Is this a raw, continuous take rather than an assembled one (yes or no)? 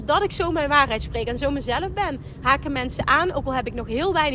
yes